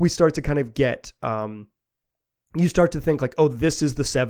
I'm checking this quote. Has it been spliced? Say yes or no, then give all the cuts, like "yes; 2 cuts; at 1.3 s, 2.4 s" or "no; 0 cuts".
no; 0 cuts